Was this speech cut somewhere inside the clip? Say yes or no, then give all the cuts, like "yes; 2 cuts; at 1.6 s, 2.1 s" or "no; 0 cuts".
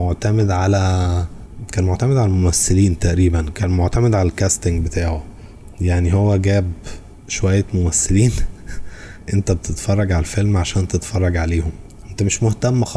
no; 0 cuts